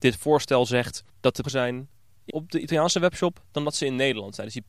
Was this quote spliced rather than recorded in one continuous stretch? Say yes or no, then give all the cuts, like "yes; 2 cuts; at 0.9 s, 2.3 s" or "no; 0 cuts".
yes; 3 cuts; at 1.1 s, 1.4 s, 2.3 s